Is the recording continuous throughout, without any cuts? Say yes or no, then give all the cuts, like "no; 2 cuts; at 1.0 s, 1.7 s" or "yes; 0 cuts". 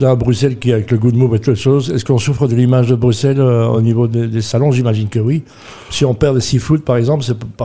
yes; 0 cuts